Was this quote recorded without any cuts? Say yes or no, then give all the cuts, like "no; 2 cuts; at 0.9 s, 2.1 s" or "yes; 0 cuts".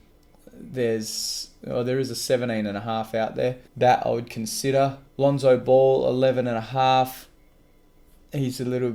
no; 2 cuts; at 3.7 s, 5.1 s